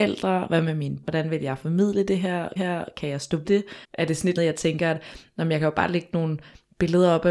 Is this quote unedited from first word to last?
no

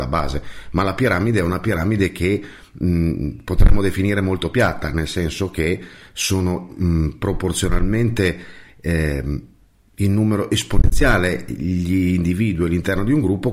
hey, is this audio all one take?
yes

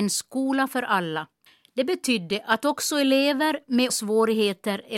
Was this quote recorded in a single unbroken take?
no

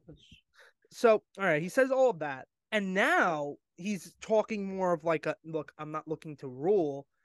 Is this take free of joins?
no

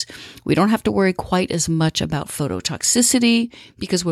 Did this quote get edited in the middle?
no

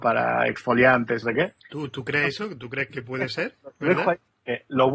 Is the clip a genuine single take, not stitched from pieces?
no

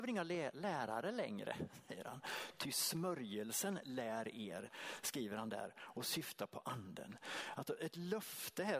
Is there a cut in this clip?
no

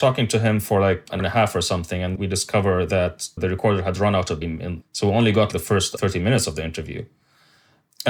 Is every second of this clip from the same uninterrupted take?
no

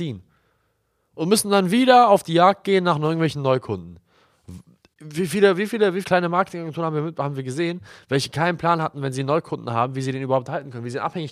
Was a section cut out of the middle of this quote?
yes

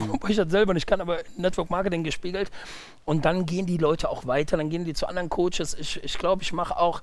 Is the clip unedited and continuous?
yes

